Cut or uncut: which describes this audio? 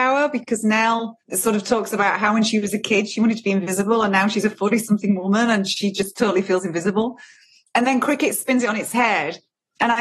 cut